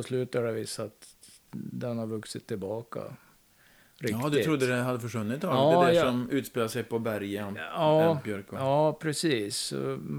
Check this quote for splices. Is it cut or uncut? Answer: uncut